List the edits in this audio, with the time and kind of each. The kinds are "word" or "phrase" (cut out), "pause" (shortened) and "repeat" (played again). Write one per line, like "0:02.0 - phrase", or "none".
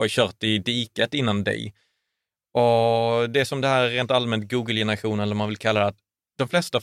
none